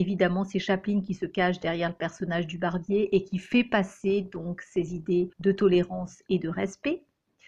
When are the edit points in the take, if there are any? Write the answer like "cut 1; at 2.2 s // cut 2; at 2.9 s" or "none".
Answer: cut 1; at 5.3 s